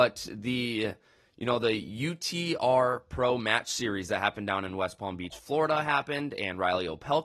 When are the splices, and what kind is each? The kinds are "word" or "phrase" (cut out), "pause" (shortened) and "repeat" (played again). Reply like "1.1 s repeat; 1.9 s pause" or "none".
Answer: none